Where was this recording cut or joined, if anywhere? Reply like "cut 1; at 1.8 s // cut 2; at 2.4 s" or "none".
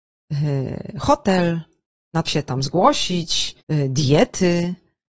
cut 1; at 2.3 s // cut 2; at 3.6 s